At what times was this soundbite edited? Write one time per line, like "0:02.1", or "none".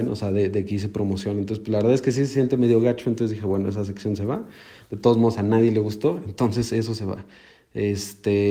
none